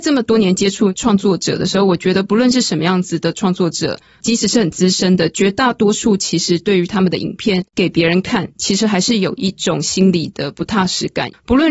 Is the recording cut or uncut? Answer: uncut